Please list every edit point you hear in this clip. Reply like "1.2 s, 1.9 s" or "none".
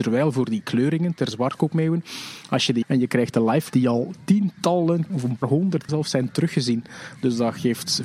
1.3 s, 2.8 s, 3.7 s, 5.1 s, 5.4 s, 5.9 s